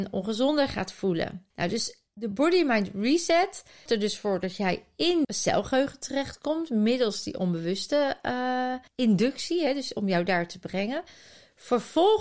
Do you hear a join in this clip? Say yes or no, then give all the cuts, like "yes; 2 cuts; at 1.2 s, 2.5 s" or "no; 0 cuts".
yes; 4 cuts; at 1.5 s, 3.9 s, 5.2 s, 8.9 s